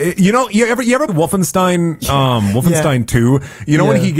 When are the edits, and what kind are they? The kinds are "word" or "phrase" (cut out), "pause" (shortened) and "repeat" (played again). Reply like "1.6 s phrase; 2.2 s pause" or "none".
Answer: 1.1 s word